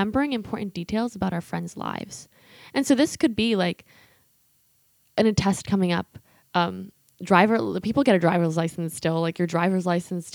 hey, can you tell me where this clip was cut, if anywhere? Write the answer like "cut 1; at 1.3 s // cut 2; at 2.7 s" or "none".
none